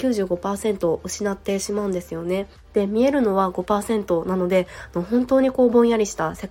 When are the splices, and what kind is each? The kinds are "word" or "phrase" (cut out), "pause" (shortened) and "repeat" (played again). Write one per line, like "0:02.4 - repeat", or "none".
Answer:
0:02.5 - pause